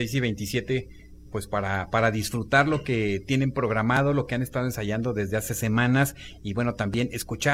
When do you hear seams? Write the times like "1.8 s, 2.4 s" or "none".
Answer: none